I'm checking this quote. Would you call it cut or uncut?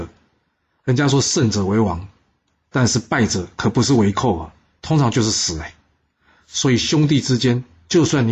uncut